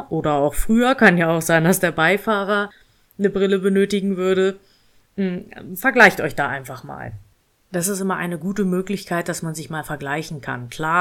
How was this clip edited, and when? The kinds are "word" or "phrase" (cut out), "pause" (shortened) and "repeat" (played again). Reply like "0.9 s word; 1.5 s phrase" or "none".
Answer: none